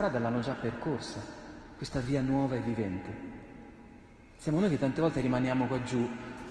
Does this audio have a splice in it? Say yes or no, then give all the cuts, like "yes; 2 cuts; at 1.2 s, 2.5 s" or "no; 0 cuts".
no; 0 cuts